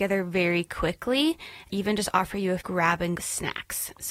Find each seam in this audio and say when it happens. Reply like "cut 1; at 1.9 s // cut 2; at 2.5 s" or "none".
cut 1; at 1.7 s // cut 2; at 2.6 s // cut 3; at 3.2 s